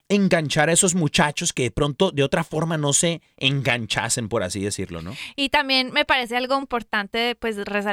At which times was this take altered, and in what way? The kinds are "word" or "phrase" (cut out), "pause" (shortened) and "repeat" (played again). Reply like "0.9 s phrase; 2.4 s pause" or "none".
6.6 s word